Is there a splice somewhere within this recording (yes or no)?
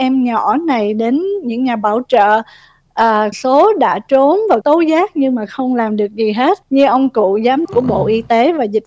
yes